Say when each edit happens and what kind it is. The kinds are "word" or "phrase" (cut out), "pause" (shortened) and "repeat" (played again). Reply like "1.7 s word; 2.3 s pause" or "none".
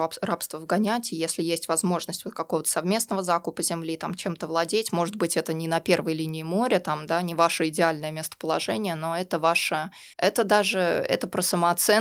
10.1 s pause